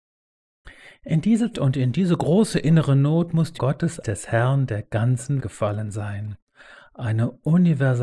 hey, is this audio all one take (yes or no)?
no